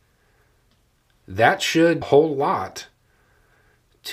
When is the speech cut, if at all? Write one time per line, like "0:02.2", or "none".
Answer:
0:02.0